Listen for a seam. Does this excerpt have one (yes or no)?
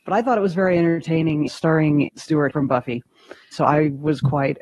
yes